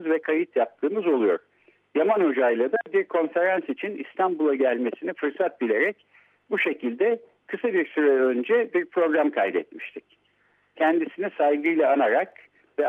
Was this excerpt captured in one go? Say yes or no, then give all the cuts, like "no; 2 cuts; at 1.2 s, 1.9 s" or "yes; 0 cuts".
yes; 0 cuts